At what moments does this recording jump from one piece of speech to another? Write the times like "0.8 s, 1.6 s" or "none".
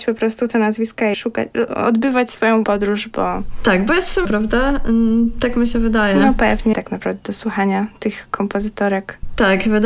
1.1 s, 2.6 s, 4.2 s, 6.7 s